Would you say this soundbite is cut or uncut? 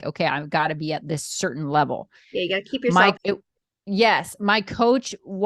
cut